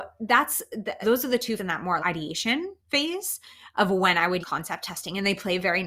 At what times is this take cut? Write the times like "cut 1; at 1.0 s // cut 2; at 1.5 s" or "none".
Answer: cut 1; at 1.0 s // cut 2; at 1.6 s // cut 3; at 2.0 s // cut 4; at 2.8 s // cut 5; at 4.4 s